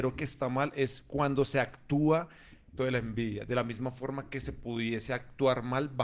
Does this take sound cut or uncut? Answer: cut